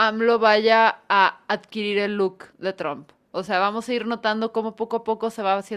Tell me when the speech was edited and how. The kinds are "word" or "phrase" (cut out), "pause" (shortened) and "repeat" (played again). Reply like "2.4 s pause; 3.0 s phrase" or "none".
2.5 s pause